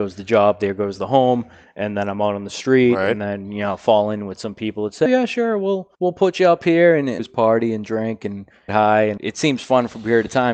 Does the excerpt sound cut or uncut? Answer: cut